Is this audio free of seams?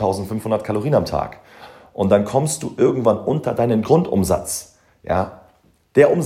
yes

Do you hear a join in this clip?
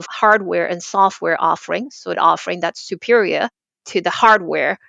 yes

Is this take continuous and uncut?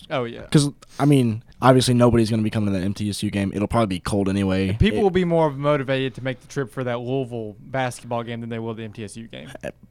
no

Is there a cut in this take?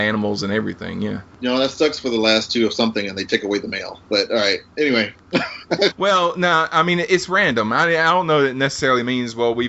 no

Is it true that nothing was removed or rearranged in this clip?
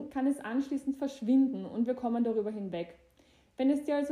yes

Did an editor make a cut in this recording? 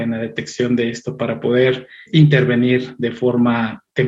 no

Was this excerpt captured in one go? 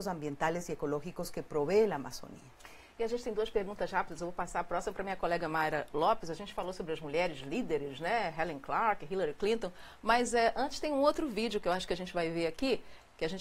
yes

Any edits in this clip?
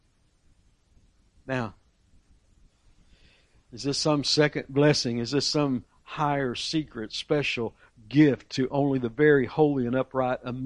no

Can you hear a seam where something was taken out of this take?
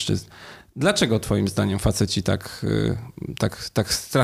no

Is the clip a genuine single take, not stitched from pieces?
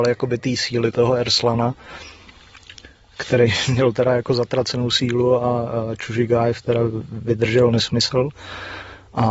yes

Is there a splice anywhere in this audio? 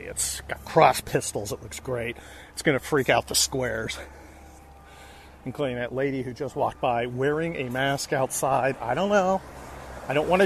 no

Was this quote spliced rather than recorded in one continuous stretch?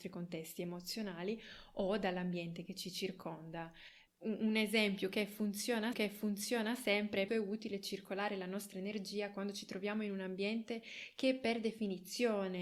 yes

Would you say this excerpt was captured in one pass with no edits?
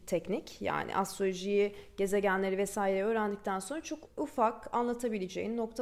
no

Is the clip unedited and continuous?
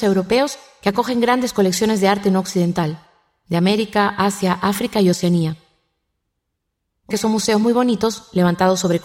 no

